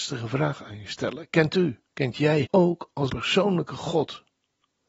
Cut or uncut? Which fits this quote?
cut